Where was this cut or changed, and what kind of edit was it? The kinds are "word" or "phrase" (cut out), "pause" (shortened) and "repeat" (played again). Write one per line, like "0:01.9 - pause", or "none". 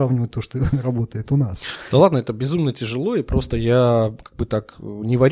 none